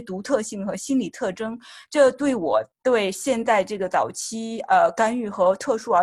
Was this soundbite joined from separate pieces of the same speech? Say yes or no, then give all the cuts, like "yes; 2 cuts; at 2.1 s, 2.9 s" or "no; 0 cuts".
yes; 1 cut; at 2.7 s